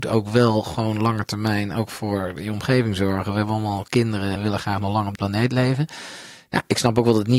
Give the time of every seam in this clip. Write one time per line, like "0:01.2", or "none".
0:04.4
0:05.2